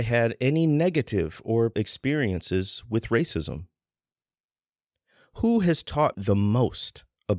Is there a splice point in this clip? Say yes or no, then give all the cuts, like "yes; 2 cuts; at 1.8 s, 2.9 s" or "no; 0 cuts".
yes; 2 cuts; at 1.7 s, 6.1 s